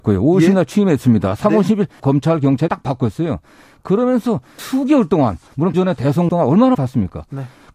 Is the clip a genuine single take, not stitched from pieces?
no; 6 cuts; at 2.0 s, 2.7 s, 4.6 s, 5.7 s, 6.3 s, 6.7 s

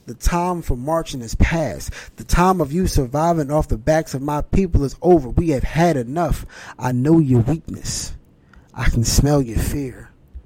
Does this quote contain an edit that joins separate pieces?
no; 0 cuts

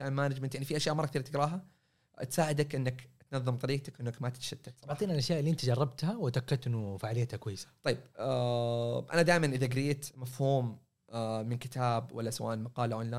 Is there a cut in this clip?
no; 0 cuts

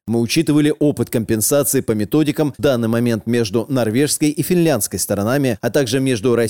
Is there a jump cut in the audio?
yes; 1 cut; at 2.6 s

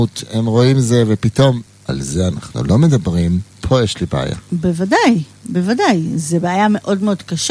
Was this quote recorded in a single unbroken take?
no; 2 cuts; at 1.7 s, 3.5 s

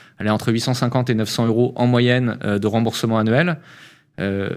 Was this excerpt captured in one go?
yes; 0 cuts

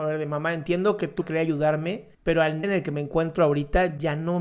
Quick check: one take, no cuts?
no; 3 cuts; at 1.2 s, 2.1 s, 2.6 s

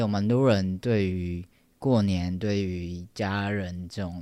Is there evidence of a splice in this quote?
no; 0 cuts

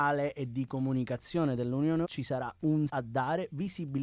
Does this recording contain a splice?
yes; 2 cuts; at 2.0 s, 2.9 s

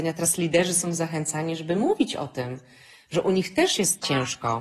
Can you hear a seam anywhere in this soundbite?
no; 0 cuts

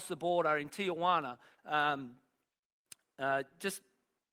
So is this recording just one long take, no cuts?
no; 1 cut; at 1.6 s

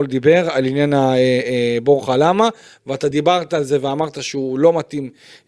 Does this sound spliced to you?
no; 0 cuts

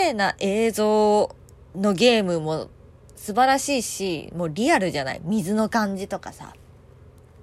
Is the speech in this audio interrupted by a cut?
no; 0 cuts

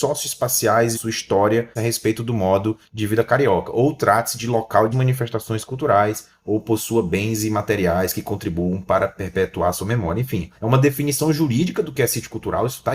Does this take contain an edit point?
yes; 3 cuts; at 0.9 s, 1.8 s, 4.9 s

